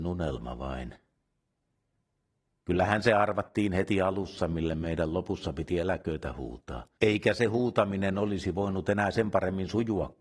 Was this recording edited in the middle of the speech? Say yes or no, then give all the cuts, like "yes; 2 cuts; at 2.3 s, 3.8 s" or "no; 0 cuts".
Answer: yes; 1 cut; at 7.0 s